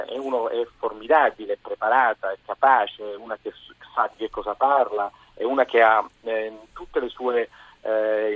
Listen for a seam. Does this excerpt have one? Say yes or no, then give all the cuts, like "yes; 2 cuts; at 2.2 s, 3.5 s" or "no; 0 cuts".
no; 0 cuts